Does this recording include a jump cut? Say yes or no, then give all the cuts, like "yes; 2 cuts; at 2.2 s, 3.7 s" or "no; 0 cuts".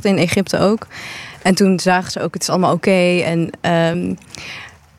no; 0 cuts